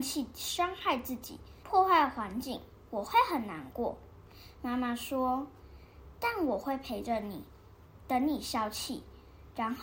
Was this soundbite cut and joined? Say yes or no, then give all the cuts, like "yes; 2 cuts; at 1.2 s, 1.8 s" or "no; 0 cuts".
yes; 1 cut; at 1.6 s